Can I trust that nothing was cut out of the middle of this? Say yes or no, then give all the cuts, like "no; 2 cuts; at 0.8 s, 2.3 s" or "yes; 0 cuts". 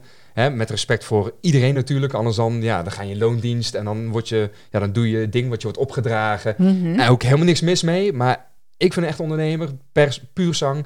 yes; 0 cuts